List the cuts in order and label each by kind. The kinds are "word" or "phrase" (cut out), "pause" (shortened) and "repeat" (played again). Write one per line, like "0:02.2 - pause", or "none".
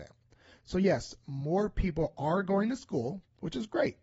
none